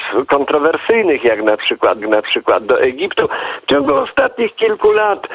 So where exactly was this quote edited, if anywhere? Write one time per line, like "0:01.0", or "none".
0:02.0